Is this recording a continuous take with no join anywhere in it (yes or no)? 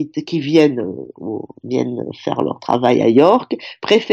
yes